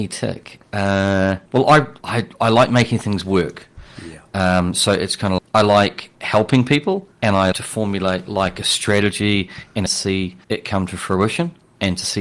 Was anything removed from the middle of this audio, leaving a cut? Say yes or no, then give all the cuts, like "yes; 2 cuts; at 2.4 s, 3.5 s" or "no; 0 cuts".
yes; 8 cuts; at 1.5 s, 2.0 s, 5.4 s, 6.2 s, 7.1 s, 7.5 s, 9.9 s, 10.4 s